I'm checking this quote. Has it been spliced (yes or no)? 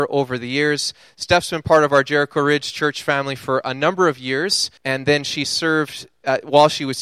yes